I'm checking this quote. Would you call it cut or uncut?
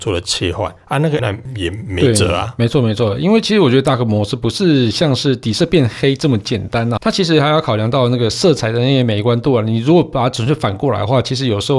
cut